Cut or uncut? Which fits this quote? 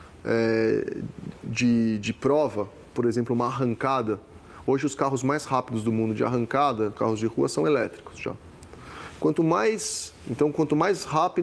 uncut